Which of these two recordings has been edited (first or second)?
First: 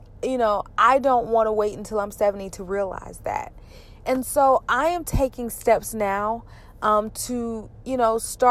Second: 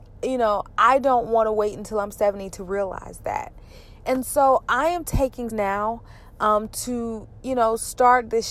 second